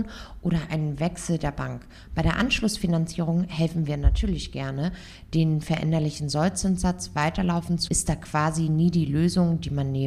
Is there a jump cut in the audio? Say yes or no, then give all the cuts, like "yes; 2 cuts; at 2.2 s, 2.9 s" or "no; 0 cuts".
yes; 1 cut; at 7.9 s